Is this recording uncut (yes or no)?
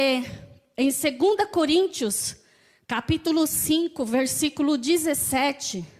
yes